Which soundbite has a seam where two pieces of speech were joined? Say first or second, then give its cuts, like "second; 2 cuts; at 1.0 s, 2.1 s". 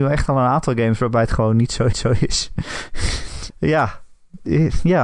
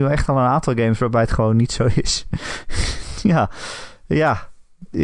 first; 2 cuts; at 1.9 s, 3.5 s